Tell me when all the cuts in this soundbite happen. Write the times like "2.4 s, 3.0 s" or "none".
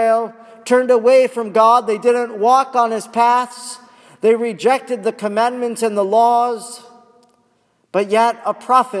none